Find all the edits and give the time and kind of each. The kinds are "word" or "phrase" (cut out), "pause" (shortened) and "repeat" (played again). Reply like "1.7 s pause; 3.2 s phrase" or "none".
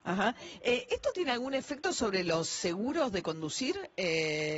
none